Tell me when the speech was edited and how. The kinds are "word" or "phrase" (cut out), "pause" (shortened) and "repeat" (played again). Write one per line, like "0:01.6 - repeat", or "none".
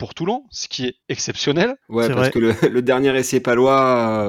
0:01.8 - pause